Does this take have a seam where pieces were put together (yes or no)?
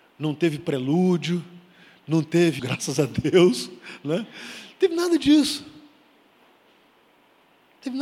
yes